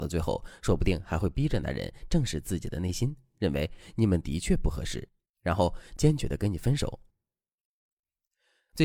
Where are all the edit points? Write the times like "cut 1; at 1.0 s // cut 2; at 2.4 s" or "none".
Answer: none